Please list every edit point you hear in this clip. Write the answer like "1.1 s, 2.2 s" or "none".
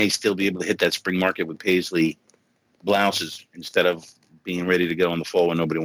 none